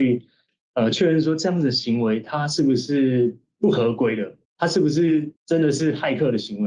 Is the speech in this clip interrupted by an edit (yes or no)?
yes